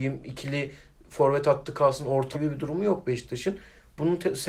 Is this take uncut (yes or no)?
no